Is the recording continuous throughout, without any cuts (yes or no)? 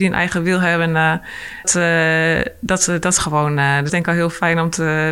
no